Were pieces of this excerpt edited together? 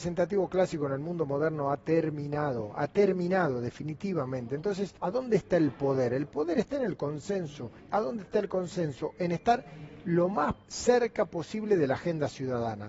yes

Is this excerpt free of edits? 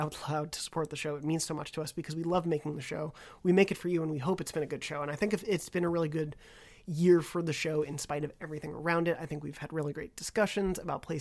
yes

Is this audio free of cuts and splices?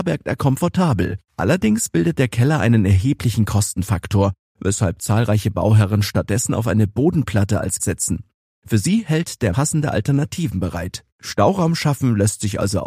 no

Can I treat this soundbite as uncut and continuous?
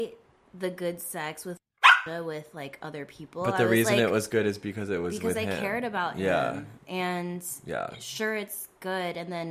yes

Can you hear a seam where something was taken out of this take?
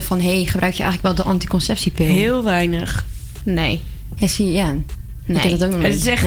no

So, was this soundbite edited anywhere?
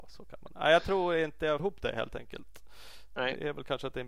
yes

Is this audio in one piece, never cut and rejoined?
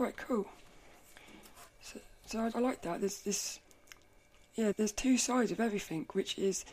no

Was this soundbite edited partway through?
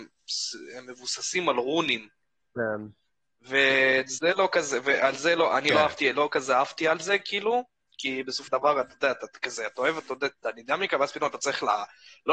yes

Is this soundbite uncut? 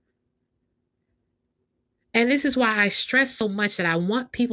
yes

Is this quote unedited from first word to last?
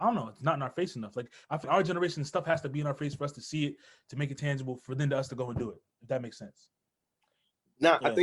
no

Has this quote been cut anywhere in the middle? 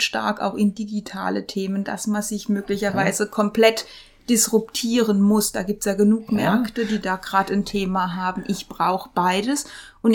no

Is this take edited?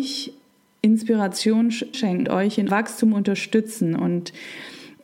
yes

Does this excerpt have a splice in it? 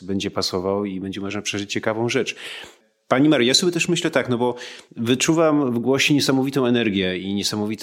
no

